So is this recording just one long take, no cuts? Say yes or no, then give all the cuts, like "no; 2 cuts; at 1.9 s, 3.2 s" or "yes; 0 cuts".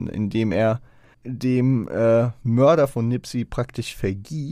no; 1 cut; at 1.1 s